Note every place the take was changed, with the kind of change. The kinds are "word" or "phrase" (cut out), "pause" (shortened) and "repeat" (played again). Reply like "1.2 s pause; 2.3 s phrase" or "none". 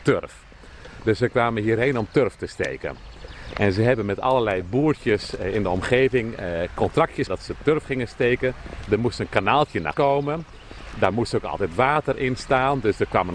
7.3 s word; 9.9 s word